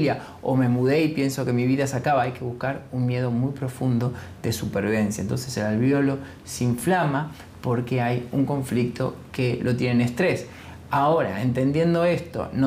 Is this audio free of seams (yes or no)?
yes